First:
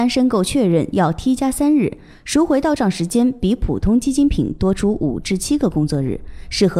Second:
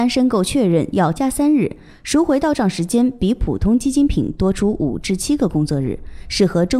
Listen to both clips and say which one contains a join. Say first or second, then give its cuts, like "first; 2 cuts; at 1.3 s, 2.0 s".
second; 1 cut; at 1.2 s